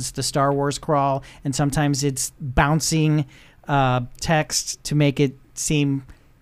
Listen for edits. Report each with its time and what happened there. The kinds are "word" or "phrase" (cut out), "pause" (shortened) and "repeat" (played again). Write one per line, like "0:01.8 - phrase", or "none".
none